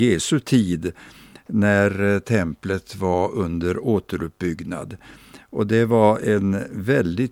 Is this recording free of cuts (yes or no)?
yes